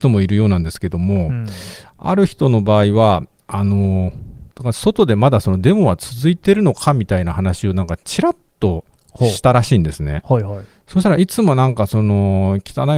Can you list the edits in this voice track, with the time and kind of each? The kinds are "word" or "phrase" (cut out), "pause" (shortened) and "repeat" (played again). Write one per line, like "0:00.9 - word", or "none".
0:04.5 - pause
0:08.9 - pause